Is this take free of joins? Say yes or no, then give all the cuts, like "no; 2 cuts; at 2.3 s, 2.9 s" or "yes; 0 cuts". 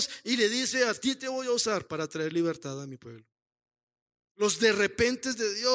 yes; 0 cuts